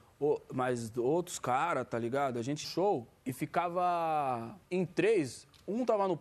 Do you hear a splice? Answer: yes; 3 cuts; at 2.6 s, 3.2 s, 4.6 s

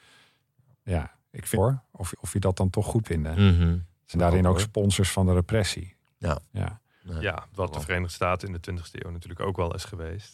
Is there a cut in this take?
yes; 6 cuts; at 1.5 s, 2.1 s, 3.0 s, 4.1 s, 6.5 s, 7.5 s

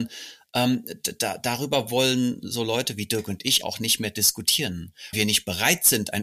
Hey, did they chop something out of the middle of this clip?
yes; 2 cuts; at 3.6 s, 5.1 s

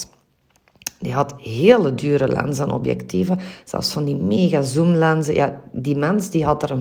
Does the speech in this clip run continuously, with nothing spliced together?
yes; 0 cuts

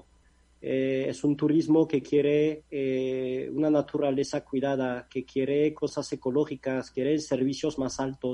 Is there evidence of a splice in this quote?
no; 0 cuts

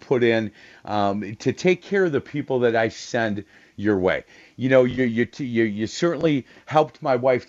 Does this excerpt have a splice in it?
no; 0 cuts

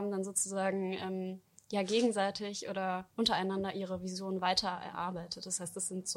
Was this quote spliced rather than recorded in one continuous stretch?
no; 0 cuts

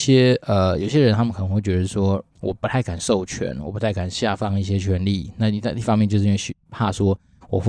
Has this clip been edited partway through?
yes; 1 cut; at 2.3 s

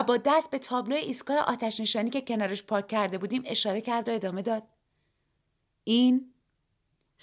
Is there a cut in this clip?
no; 0 cuts

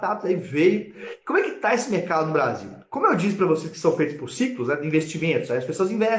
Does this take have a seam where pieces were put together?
no; 0 cuts

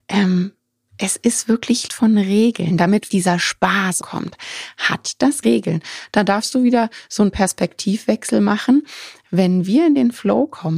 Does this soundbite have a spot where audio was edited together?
yes; 4 cuts; at 1.9 s, 3.1 s, 4.0 s, 5.4 s

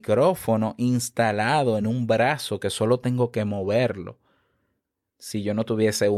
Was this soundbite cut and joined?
no; 0 cuts

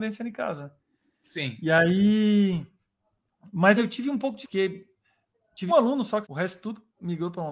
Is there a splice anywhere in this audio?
yes; 4 cuts; at 3.8 s, 4.4 s, 5.7 s, 6.2 s

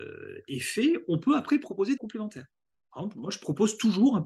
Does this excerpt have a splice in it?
yes; 1 cut; at 2.0 s

